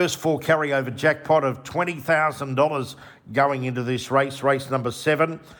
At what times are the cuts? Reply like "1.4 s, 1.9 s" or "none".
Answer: none